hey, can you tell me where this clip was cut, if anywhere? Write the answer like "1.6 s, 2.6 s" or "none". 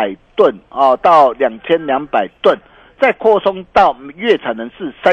none